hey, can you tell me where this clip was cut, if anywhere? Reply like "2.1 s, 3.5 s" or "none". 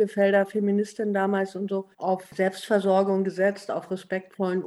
1.9 s